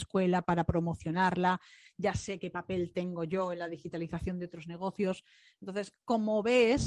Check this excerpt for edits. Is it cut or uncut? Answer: uncut